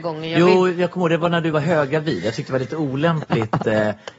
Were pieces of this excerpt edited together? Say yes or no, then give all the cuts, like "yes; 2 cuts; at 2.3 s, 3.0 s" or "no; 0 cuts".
no; 0 cuts